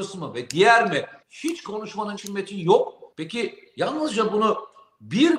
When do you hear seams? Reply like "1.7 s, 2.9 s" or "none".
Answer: 1.2 s, 2.2 s, 3.1 s

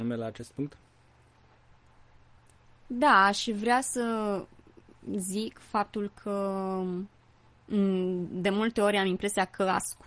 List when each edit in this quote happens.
none

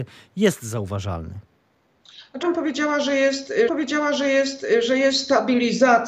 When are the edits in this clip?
2.4 s, 3.7 s

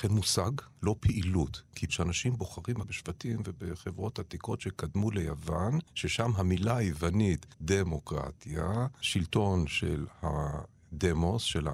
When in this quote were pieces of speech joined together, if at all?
1.9 s, 2.8 s, 5.9 s, 7.5 s

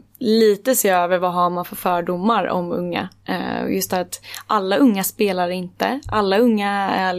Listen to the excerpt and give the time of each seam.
none

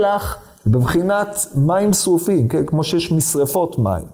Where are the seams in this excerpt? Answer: none

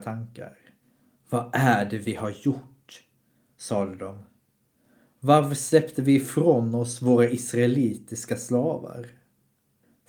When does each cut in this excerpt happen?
none

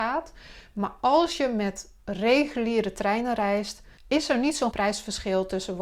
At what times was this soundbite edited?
2.0 s, 4.0 s, 4.7 s

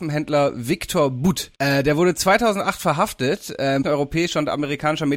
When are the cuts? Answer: 1.5 s, 3.8 s

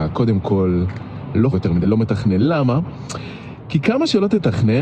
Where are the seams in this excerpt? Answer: 1.5 s, 1.8 s

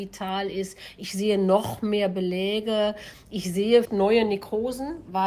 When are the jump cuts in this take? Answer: 3.8 s

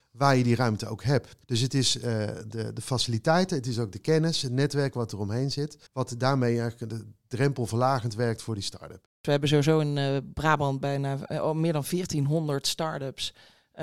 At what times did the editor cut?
1.4 s, 5.9 s

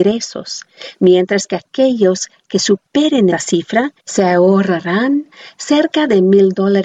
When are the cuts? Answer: 3.3 s, 4.0 s

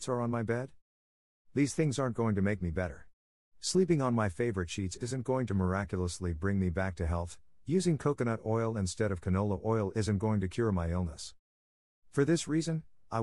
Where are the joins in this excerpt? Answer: none

